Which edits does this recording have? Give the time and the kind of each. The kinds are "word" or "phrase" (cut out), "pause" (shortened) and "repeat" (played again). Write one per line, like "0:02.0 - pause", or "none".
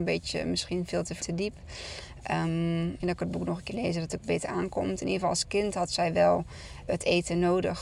0:01.2 - word
0:03.0 - word
0:03.7 - word
0:06.9 - word